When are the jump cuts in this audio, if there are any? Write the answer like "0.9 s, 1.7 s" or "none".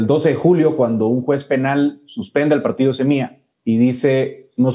3.5 s